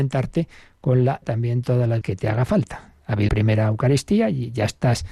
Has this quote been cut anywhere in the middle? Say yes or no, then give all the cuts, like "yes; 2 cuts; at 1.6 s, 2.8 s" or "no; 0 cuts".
yes; 3 cuts; at 1.2 s, 2.0 s, 3.3 s